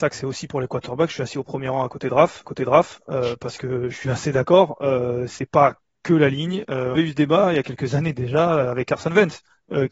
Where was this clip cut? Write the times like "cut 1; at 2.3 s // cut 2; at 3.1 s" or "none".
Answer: cut 1; at 2.5 s // cut 2; at 3.9 s // cut 3; at 7.0 s